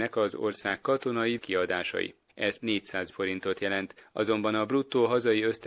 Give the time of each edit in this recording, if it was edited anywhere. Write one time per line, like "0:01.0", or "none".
0:01.4
0:02.6
0:03.1